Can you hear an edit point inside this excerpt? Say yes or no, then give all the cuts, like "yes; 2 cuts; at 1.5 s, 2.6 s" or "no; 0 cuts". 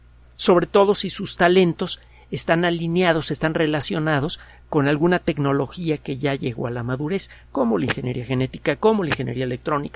no; 0 cuts